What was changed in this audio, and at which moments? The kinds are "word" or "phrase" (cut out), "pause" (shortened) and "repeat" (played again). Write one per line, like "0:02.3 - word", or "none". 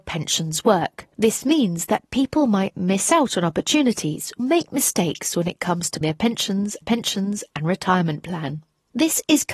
0:04.4 - word
0:06.0 - word
0:06.8 - repeat